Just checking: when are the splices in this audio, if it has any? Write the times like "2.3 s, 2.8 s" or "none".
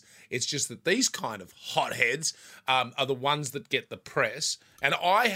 none